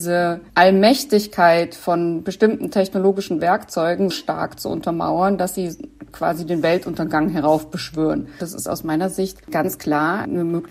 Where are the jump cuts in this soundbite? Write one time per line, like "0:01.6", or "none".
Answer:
0:04.1

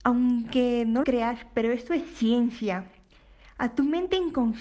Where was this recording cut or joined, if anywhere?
0:01.0

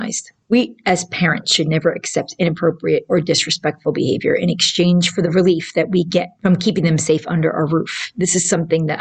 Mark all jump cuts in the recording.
none

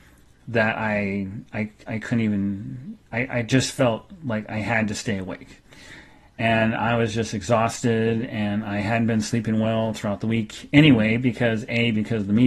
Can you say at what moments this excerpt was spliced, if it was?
none

